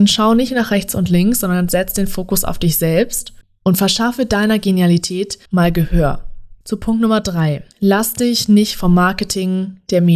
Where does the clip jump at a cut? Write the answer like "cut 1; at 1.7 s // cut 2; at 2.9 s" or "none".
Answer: cut 1; at 5.5 s // cut 2; at 6.6 s // cut 3; at 7.7 s